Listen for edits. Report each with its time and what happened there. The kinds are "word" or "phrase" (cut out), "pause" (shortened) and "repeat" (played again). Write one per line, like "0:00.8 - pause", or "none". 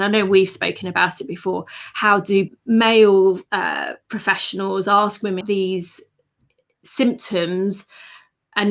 0:02.5 - word
0:04.0 - pause
0:05.4 - word